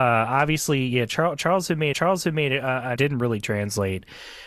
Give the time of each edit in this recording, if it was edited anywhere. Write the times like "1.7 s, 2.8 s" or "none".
1.9 s, 3.0 s